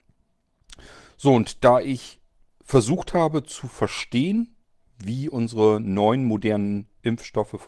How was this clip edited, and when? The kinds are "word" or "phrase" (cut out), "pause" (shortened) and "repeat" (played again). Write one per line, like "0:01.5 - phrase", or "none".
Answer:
none